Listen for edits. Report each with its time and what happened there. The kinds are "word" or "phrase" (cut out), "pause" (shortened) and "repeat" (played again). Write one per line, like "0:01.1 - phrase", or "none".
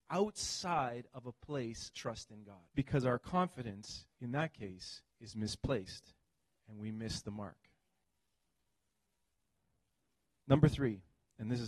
0:01.9 - word
0:02.7 - pause
0:04.1 - pause
0:05.1 - pause
0:06.5 - pause